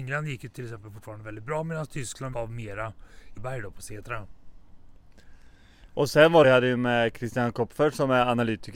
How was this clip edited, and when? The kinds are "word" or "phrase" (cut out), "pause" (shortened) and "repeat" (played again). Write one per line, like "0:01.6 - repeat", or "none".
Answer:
0:02.3 - word
0:03.4 - phrase
0:06.4 - phrase